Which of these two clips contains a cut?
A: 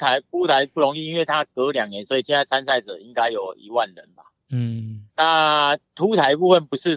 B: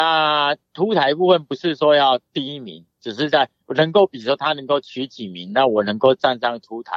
A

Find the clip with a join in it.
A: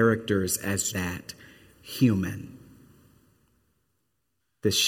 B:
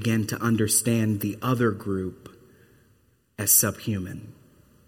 A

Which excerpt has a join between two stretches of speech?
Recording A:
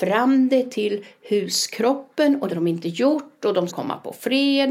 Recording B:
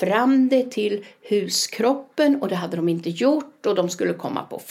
A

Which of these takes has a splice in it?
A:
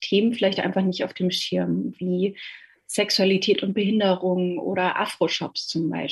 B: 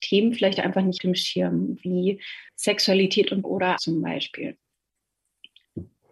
B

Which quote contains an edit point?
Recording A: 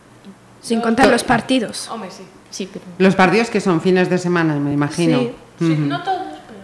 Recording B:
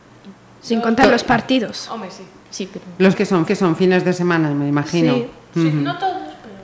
B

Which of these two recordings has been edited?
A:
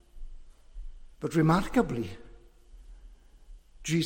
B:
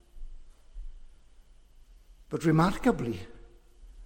A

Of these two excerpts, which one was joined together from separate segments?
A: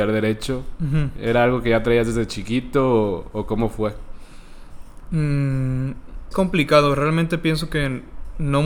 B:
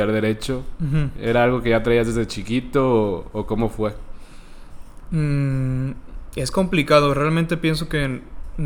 A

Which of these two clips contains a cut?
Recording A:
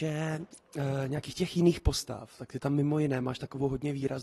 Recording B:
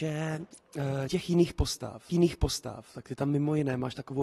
B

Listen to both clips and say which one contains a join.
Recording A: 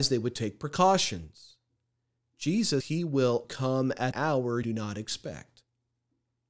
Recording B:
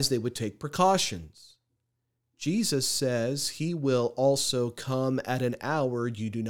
A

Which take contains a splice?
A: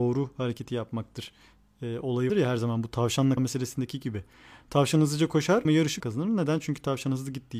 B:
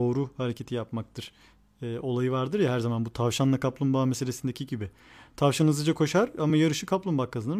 A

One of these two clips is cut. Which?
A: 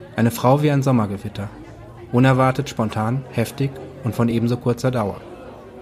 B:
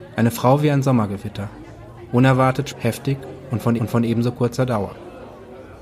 B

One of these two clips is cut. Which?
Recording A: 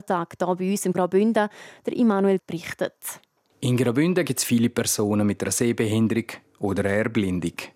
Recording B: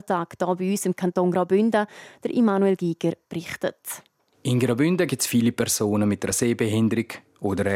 A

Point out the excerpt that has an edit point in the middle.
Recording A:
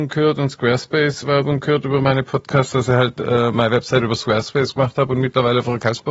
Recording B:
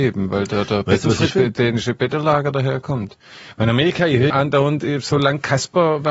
B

